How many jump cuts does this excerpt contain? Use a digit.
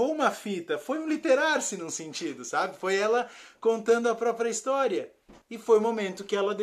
1